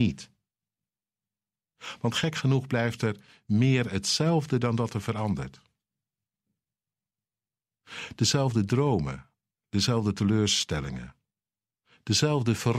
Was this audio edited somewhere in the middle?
no; 0 cuts

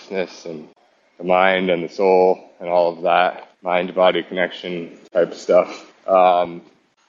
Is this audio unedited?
no; 2 cuts; at 3.5 s, 5.9 s

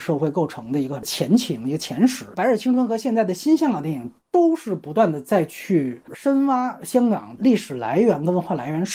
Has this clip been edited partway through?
yes; 1 cut; at 2.3 s

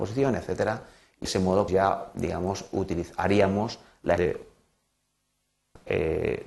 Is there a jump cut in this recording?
yes; 3 cuts; at 1.2 s, 1.7 s, 4.2 s

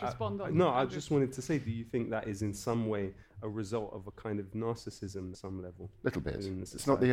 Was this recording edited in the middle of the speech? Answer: yes; 1 cut; at 5.3 s

